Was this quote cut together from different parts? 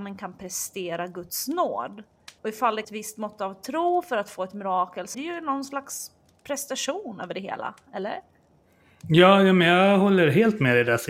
yes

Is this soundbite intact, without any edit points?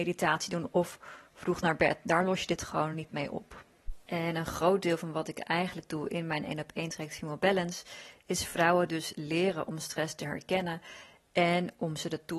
yes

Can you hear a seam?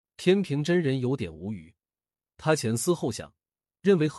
no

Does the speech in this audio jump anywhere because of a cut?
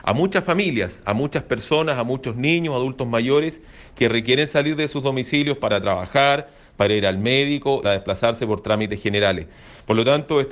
yes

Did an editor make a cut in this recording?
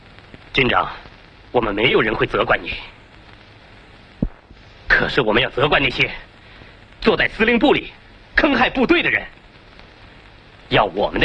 no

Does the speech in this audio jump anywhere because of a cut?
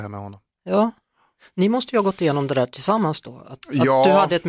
no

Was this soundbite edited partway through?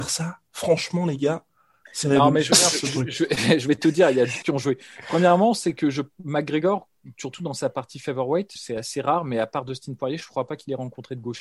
yes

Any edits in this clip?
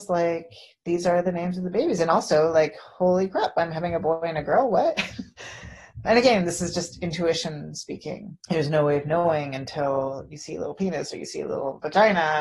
yes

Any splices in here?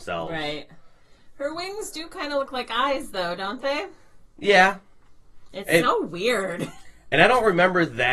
no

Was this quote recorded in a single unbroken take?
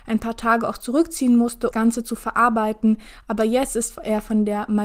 no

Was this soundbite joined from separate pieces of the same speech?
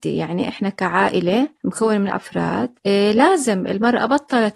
yes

